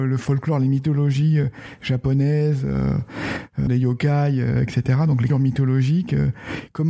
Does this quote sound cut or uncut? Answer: cut